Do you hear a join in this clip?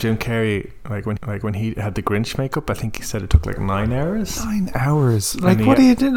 yes; 1 cut; at 1.2 s

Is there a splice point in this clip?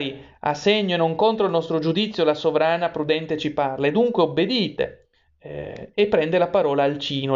no; 0 cuts

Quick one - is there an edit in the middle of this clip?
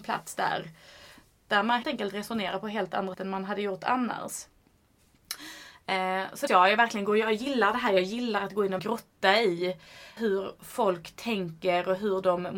yes; 5 cuts; at 1.8 s, 3.1 s, 6.5 s, 8.8 s, 10.2 s

